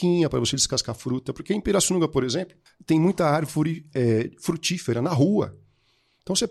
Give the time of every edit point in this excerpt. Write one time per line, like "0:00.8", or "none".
0:02.7